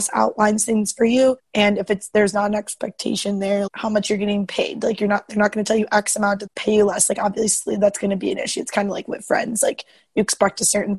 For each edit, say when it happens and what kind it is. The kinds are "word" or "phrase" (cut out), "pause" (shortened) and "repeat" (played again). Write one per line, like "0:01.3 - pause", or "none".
0:01.4 - pause
0:03.7 - word
0:06.5 - word